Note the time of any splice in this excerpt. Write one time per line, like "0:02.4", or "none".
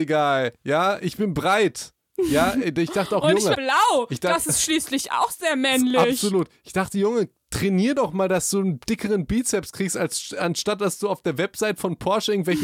0:03.5